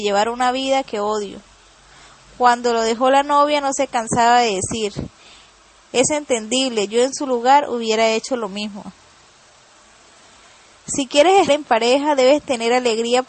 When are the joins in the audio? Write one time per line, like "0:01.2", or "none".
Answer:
0:11.5